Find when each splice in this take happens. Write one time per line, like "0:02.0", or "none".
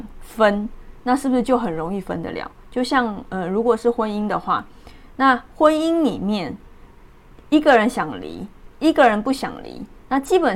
none